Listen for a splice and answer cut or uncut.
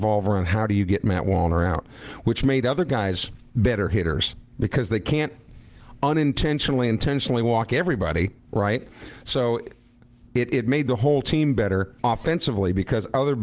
cut